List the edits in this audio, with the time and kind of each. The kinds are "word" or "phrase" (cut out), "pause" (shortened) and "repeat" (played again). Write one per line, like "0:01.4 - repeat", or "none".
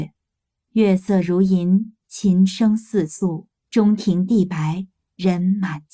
0:03.6 - pause